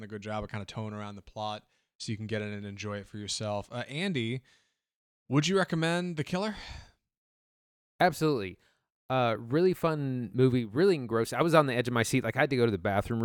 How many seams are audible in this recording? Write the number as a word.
zero